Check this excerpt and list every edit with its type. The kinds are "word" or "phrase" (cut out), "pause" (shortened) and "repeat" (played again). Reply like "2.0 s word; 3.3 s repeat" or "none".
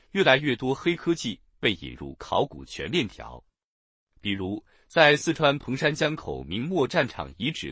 none